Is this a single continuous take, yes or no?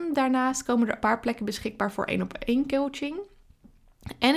no